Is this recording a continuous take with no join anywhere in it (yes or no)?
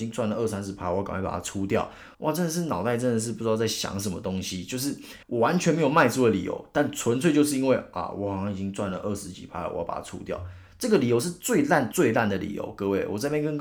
no